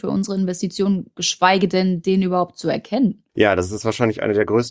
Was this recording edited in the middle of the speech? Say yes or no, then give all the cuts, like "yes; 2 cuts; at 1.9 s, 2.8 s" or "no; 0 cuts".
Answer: yes; 1 cut; at 3.3 s